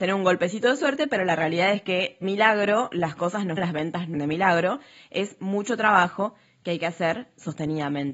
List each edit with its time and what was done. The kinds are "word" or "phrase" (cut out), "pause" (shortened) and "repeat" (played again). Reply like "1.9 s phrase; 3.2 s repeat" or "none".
2.2 s word; 3.6 s word; 4.1 s word